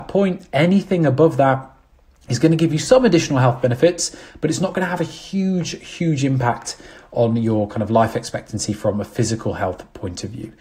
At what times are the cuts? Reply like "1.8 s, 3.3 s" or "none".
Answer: none